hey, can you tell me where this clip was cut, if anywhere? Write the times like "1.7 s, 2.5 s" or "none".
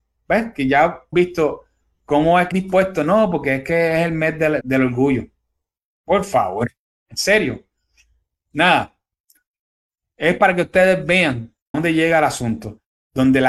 1.1 s, 2.5 s, 4.6 s, 11.7 s